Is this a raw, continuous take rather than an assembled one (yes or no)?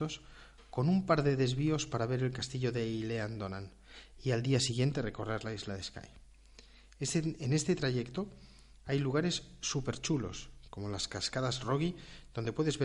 yes